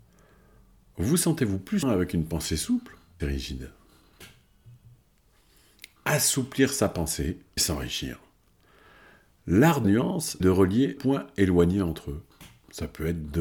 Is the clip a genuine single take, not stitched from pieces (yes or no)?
no